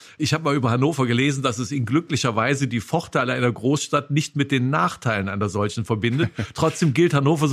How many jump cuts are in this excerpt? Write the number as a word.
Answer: zero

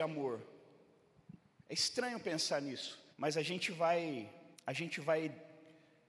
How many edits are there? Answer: three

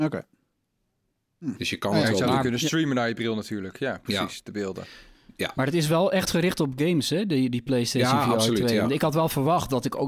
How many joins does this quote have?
zero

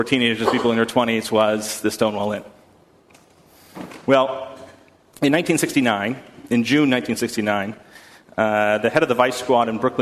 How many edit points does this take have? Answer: zero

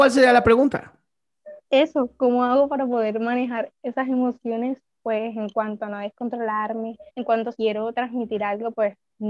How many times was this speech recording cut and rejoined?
three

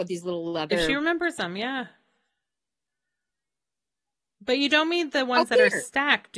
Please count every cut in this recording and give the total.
zero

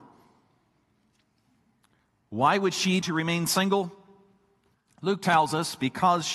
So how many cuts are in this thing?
one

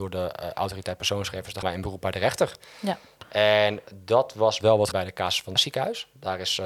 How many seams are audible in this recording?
four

